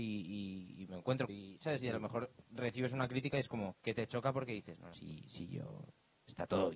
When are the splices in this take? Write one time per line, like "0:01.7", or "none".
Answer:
0:01.3
0:03.8
0:04.9